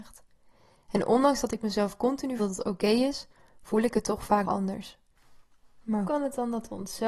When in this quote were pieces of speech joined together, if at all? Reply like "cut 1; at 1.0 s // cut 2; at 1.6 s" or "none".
cut 1; at 2.4 s // cut 2; at 4.4 s // cut 3; at 6.0 s